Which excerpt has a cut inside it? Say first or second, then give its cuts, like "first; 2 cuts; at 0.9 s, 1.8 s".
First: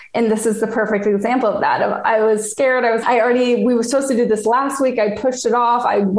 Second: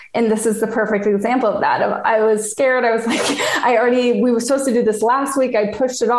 first; 1 cut; at 3.0 s